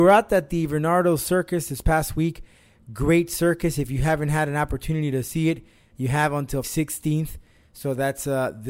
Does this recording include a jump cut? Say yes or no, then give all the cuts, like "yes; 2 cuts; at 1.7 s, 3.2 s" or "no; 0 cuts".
yes; 1 cut; at 6.6 s